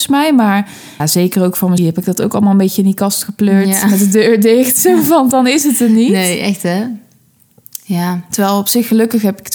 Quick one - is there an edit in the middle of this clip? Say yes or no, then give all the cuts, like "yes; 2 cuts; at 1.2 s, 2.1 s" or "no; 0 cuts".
yes; 2 cuts; at 1.0 s, 1.8 s